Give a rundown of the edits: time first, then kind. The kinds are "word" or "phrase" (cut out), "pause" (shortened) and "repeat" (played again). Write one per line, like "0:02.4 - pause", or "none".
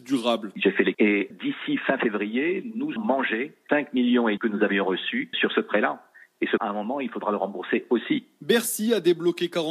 0:00.9 - word
0:01.3 - word
0:03.0 - word
0:03.7 - word
0:04.4 - word
0:05.3 - word
0:06.6 - word